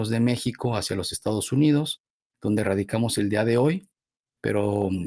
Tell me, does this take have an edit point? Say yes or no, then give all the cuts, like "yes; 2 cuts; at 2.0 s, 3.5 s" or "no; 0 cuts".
no; 0 cuts